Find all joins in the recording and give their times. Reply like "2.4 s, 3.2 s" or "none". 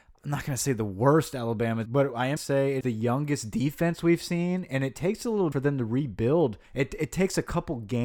1.9 s, 2.4 s, 2.8 s, 5.5 s, 6.6 s